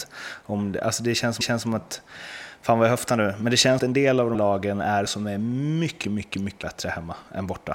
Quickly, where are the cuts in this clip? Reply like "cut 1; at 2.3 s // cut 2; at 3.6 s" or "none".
cut 1; at 1.4 s // cut 2; at 3.8 s // cut 3; at 4.3 s // cut 4; at 5.1 s // cut 5; at 6.0 s // cut 6; at 6.6 s